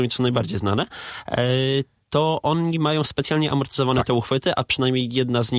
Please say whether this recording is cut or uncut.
uncut